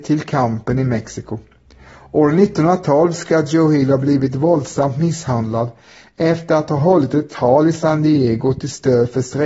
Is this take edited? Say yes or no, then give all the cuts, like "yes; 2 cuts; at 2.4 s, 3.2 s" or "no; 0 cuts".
no; 0 cuts